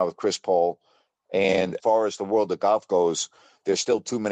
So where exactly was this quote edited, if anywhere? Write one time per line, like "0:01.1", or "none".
0:01.8